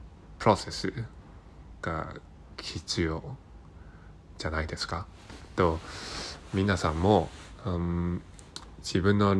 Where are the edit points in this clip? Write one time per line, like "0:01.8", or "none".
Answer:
none